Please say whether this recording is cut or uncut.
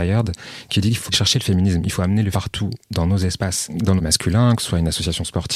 cut